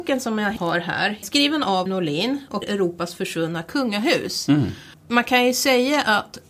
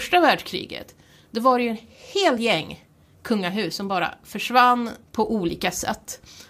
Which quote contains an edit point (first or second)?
first